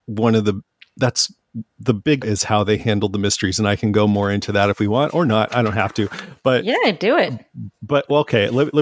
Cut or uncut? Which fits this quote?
cut